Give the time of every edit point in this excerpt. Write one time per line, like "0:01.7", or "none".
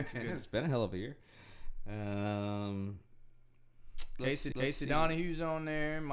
0:04.5